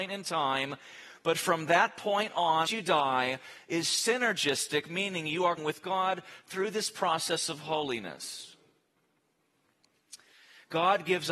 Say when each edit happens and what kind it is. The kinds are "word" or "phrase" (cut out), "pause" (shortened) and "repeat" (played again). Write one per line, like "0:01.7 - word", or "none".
0:02.7 - phrase
0:05.6 - word